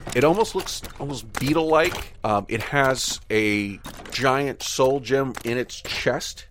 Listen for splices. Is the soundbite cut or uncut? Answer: uncut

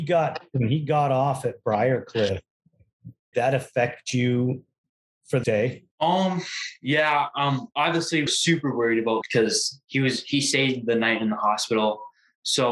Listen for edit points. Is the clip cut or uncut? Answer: cut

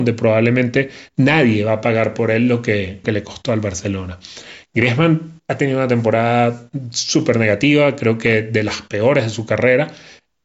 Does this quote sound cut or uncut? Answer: cut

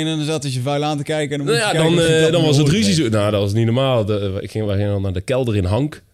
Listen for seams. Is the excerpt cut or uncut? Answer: uncut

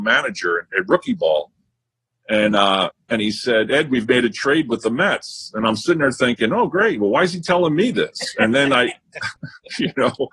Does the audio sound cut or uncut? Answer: uncut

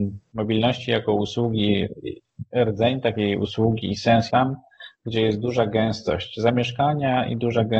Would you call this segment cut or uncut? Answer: cut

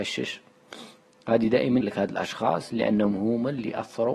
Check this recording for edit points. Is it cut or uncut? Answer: cut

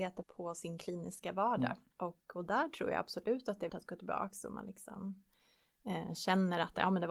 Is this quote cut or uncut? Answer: cut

